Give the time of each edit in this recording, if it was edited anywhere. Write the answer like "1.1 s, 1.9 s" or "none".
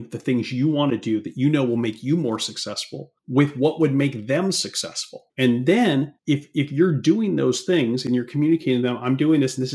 3.2 s, 5.3 s, 6.2 s